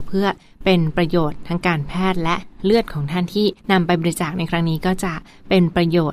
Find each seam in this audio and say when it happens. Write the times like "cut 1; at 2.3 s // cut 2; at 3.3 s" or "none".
cut 1; at 3.6 s